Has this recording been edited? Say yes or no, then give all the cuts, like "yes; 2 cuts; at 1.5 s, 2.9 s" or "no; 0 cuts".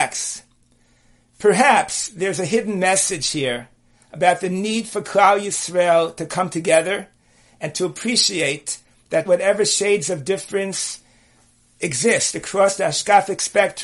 yes; 1 cut; at 9.2 s